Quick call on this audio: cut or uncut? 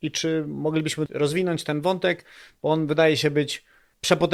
uncut